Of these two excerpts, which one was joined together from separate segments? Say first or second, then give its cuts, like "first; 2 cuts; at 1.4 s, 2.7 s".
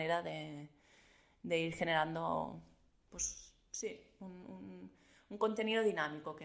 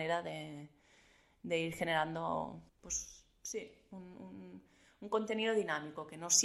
second; 1 cut; at 2.7 s